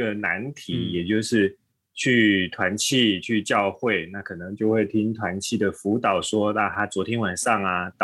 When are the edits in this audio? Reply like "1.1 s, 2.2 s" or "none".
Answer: none